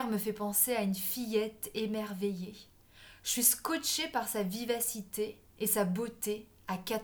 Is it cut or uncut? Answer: uncut